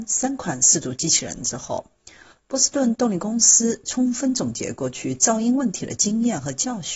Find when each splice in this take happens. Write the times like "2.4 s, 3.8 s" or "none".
none